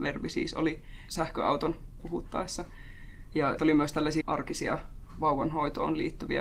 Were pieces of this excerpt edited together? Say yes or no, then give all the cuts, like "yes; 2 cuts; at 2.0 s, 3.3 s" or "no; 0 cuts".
yes; 4 cuts; at 1.1 s, 2.0 s, 3.6 s, 4.2 s